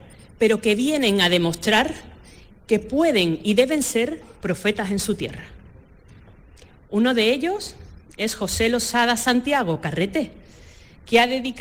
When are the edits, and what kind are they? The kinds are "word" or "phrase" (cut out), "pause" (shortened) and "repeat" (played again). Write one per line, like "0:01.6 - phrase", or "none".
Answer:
none